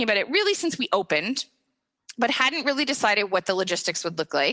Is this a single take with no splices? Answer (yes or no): yes